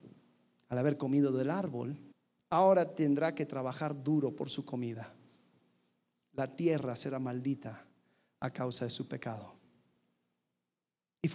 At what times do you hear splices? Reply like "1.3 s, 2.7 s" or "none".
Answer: 2.1 s